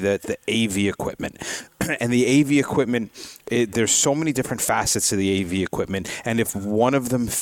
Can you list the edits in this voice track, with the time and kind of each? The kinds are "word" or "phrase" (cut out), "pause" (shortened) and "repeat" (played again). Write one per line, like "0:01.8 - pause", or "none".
none